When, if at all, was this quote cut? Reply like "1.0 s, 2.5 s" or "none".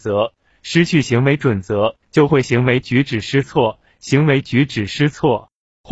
2.0 s